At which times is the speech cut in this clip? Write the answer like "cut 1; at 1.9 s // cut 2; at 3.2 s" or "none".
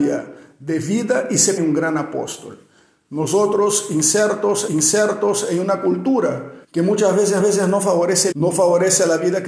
cut 1; at 1.6 s // cut 2; at 4.7 s // cut 3; at 6.6 s // cut 4; at 7.4 s // cut 5; at 8.3 s